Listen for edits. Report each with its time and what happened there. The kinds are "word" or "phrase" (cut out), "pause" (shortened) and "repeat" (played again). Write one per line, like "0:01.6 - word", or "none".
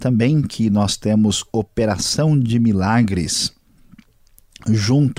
none